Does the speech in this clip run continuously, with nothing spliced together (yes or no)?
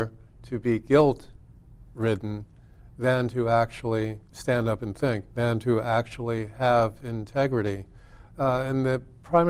no